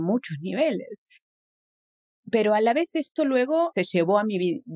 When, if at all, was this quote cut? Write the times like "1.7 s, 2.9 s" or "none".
3.7 s